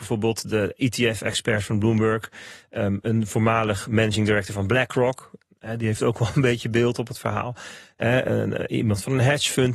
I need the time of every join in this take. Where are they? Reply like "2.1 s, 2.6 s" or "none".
none